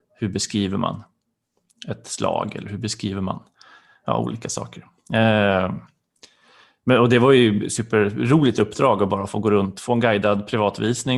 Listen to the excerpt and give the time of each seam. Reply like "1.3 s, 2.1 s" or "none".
none